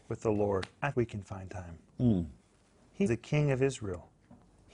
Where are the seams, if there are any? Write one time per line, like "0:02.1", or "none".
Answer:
0:00.9
0:03.1